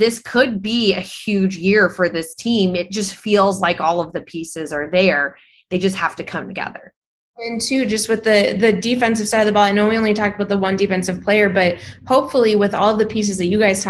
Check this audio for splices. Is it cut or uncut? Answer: uncut